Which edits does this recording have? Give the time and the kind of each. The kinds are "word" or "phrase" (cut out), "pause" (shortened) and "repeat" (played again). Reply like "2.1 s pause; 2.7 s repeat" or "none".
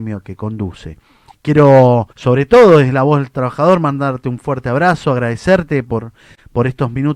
2.1 s pause